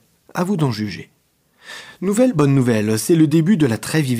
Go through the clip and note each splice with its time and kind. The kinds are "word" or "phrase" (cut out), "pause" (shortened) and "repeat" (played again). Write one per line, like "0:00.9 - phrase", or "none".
none